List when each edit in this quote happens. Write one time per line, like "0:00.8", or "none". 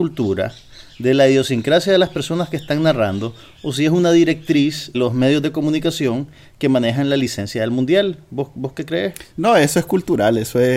0:04.9